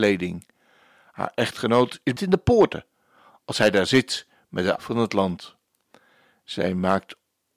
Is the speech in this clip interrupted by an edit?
yes; 2 cuts; at 2.2 s, 4.8 s

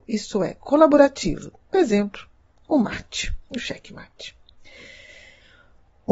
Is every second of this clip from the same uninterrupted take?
yes; 0 cuts

